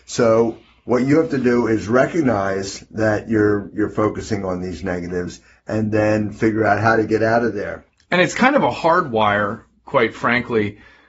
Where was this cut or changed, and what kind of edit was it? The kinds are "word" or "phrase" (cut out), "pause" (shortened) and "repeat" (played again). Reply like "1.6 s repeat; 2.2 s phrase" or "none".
none